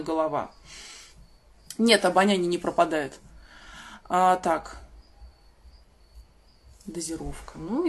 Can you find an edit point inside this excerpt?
no; 0 cuts

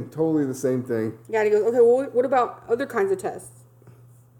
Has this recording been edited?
no; 0 cuts

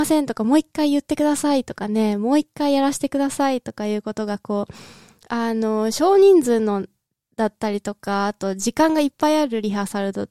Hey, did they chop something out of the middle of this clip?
no; 0 cuts

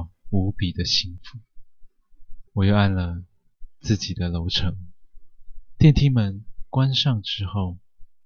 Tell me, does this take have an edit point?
yes; 1 cut; at 2.5 s

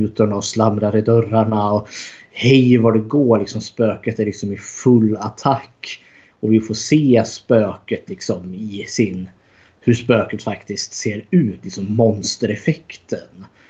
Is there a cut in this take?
no; 0 cuts

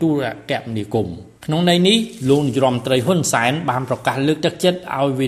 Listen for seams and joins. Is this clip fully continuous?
no; 1 cut; at 1.4 s

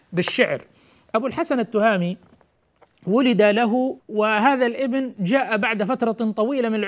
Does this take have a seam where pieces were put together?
yes; 1 cut; at 4.0 s

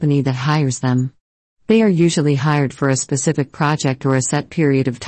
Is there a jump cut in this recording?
no; 0 cuts

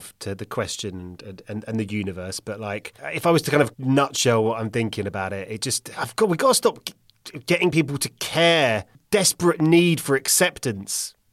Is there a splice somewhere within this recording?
no; 0 cuts

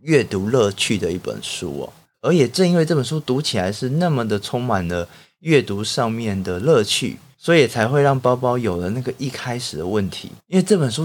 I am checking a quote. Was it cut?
no; 0 cuts

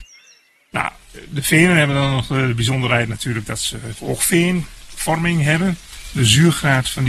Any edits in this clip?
no; 0 cuts

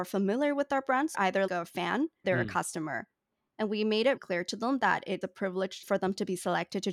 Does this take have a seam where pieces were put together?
yes; 6 cuts; at 1.1 s, 1.5 s, 2.2 s, 4.2 s, 5.2 s, 5.8 s

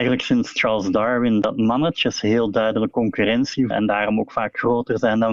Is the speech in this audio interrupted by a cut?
yes; 1 cut; at 3.7 s

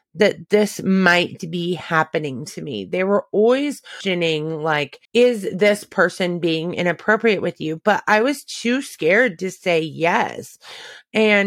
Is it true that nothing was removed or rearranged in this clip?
no; 1 cut; at 5.0 s

